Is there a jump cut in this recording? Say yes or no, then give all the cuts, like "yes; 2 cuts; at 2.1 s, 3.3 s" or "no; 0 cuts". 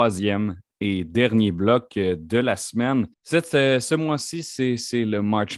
yes; 1 cut; at 3.1 s